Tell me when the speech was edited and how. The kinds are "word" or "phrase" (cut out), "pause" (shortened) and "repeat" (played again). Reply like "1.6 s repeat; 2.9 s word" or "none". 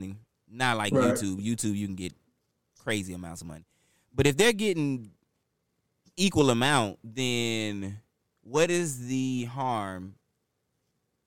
none